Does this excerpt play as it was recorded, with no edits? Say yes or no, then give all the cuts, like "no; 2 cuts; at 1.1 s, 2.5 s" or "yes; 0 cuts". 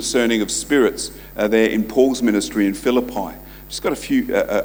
yes; 0 cuts